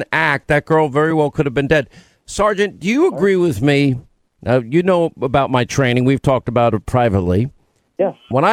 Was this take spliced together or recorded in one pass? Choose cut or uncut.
uncut